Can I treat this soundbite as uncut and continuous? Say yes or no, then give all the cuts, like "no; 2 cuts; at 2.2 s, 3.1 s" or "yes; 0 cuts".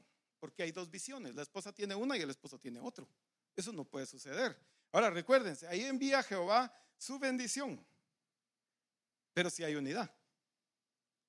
yes; 0 cuts